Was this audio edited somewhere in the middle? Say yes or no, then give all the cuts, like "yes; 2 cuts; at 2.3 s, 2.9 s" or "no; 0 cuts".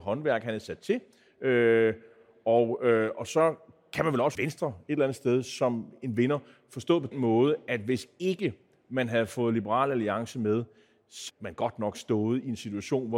yes; 3 cuts; at 4.3 s, 7.1 s, 11.3 s